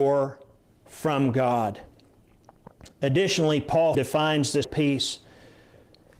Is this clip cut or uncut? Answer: cut